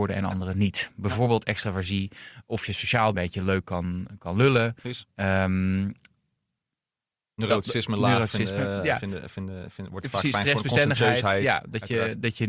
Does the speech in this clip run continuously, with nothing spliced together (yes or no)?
no